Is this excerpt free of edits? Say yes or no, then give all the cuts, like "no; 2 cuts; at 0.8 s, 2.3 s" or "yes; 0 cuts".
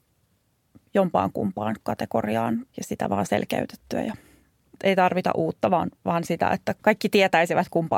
no; 2 cuts; at 2.7 s, 6.8 s